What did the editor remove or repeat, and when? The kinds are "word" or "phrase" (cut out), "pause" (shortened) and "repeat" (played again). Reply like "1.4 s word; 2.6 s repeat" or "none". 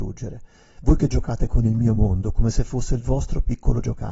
none